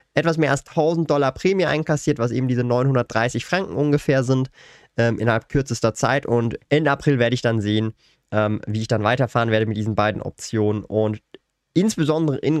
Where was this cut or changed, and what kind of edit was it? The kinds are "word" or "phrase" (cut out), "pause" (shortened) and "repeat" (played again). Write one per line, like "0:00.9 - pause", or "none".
none